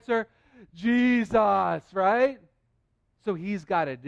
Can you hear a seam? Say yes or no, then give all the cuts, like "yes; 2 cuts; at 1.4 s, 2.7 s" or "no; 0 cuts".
yes; 1 cut; at 2.8 s